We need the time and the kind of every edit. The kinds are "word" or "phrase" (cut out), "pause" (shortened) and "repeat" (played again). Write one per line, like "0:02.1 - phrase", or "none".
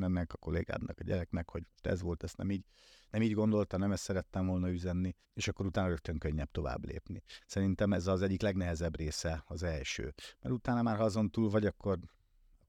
0:01.7 - pause
0:05.2 - pause